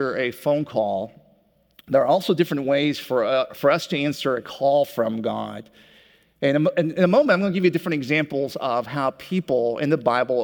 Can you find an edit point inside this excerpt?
no; 0 cuts

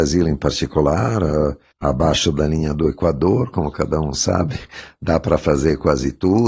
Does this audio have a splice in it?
no; 0 cuts

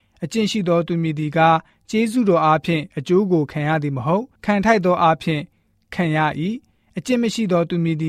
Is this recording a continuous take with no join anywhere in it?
no; 1 cut; at 4.4 s

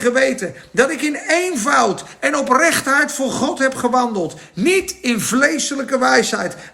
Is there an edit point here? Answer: no; 0 cuts

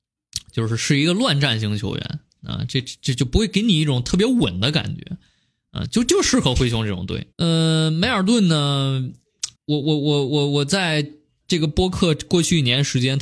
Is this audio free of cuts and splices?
no; 2 cuts; at 7.3 s, 9.6 s

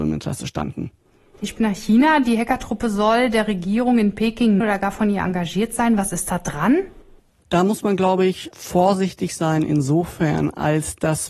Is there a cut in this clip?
yes; 2 cuts; at 1.6 s, 4.6 s

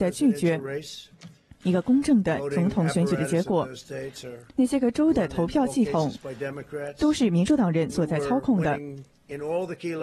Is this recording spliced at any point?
no; 0 cuts

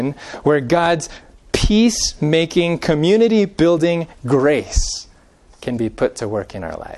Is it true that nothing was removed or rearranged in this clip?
yes; 0 cuts

